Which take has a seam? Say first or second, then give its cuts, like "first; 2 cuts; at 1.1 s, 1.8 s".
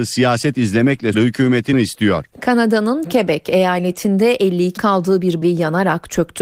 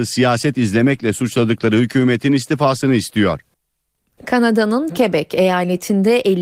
first; 5 cuts; at 1.1 s, 1.7 s, 2.3 s, 4.8 s, 5.4 s